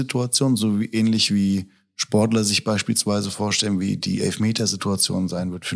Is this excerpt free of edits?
yes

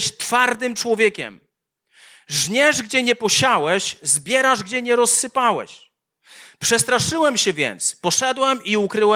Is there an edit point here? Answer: no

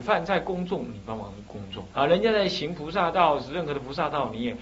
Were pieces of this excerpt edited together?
yes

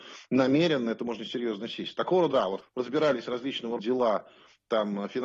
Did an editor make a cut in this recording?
yes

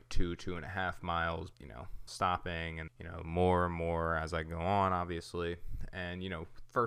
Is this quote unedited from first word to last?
no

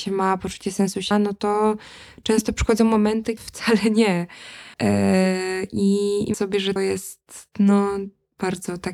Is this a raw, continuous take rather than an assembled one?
no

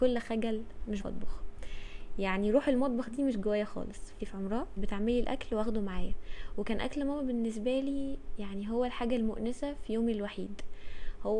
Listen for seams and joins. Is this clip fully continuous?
no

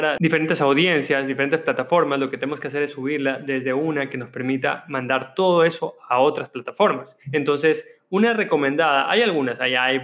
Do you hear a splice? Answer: yes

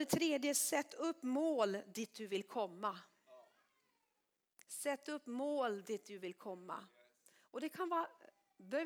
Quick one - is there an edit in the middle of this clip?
no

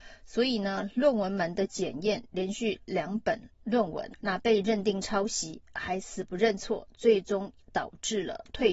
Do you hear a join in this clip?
yes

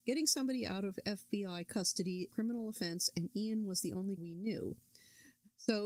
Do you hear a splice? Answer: yes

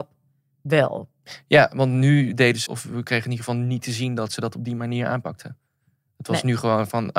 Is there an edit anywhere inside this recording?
yes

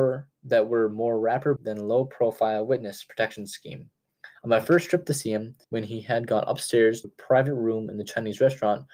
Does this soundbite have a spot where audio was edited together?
yes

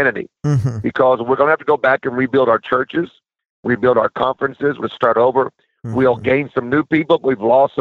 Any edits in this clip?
yes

